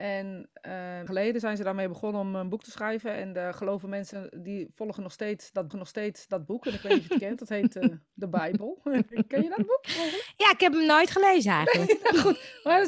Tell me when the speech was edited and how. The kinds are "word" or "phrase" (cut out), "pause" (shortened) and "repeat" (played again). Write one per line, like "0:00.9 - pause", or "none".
0:01.1 - phrase
0:05.7 - repeat